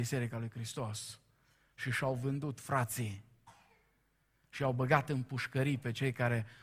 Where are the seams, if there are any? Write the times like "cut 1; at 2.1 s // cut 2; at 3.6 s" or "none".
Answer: none